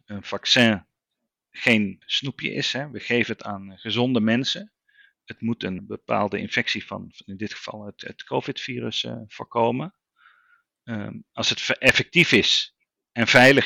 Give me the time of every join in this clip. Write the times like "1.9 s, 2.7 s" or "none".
2.0 s, 5.8 s